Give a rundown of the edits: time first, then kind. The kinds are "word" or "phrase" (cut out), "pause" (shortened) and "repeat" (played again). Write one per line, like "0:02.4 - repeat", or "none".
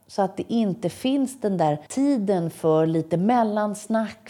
0:01.9 - pause